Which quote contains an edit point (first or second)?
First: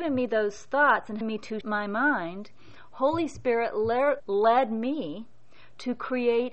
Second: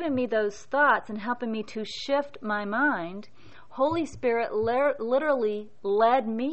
first